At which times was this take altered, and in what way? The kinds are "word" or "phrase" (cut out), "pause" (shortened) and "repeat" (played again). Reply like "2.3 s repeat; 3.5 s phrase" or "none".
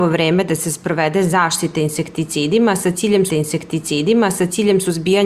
3.3 s repeat